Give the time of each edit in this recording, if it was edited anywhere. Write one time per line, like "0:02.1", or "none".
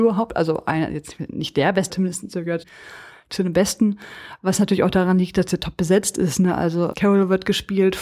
0:01.9
0:02.6
0:06.9